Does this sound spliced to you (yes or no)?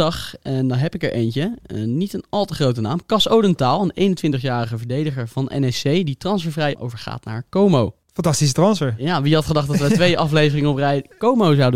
no